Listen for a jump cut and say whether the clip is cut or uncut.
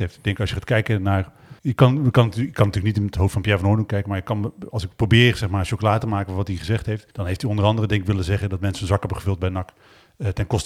cut